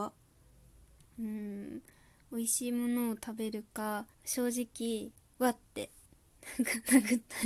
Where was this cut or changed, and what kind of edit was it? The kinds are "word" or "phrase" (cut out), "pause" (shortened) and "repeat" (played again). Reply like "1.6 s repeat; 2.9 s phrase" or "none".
4.1 s pause; 5.2 s pause; 6.1 s pause